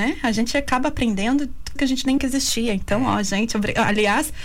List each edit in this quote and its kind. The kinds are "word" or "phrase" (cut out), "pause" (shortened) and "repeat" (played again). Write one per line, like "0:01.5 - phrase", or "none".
0:01.8 - word
0:02.2 - word